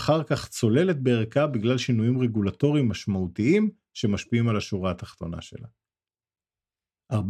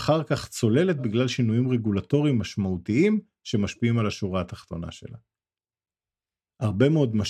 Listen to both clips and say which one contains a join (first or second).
second